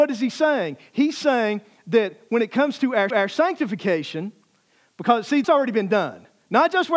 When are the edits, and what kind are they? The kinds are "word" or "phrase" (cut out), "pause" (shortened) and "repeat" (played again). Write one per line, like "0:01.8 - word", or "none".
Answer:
0:03.1 - repeat
0:05.4 - word